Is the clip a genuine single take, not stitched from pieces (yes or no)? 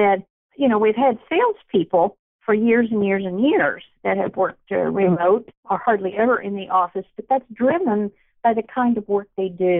yes